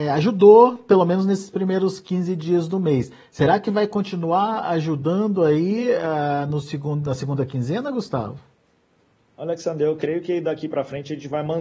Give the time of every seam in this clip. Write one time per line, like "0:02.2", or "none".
none